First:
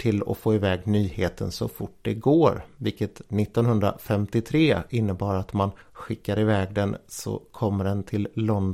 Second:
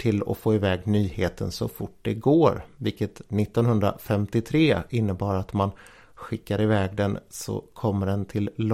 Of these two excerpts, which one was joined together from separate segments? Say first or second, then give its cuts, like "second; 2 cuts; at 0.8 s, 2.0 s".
first; 1 cut; at 5.8 s